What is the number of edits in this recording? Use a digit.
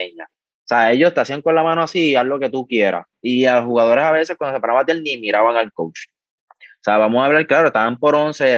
0